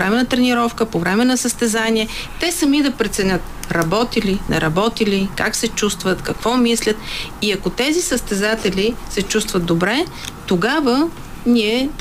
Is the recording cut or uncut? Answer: uncut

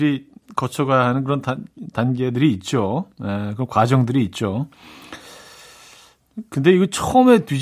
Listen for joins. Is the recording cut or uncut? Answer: uncut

